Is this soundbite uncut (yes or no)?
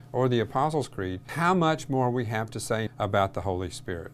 no